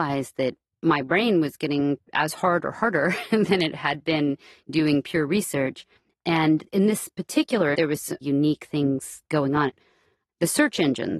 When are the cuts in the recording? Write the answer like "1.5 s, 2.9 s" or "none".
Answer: 2.0 s, 6.0 s, 7.7 s, 8.2 s